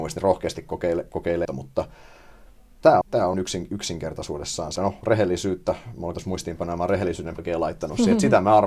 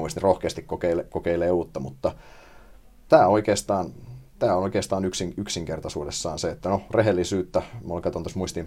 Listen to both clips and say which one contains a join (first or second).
first